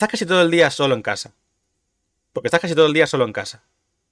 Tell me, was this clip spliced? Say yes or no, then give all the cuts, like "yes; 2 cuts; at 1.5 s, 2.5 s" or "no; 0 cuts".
no; 0 cuts